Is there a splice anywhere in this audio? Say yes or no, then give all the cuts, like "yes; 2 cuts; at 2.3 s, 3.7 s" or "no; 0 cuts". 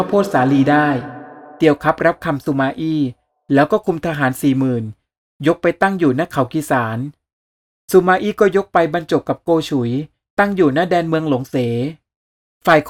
no; 0 cuts